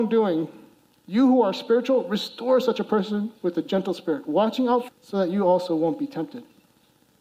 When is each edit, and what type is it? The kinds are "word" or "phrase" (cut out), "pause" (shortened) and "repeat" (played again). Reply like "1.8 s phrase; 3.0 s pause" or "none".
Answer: 4.9 s phrase